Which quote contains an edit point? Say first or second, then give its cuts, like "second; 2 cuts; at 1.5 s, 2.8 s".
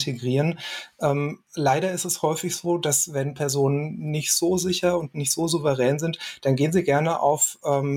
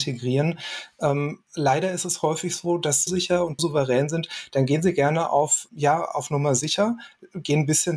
second; 3 cuts; at 3.1 s, 3.6 s, 5.7 s